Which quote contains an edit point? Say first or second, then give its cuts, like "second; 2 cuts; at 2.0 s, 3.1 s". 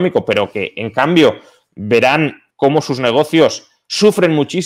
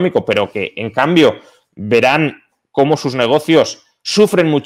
first; 1 cut; at 2.5 s